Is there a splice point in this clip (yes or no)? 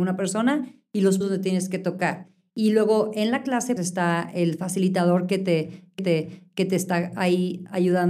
yes